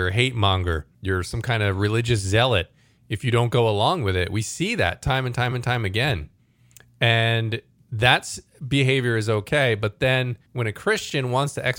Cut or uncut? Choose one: cut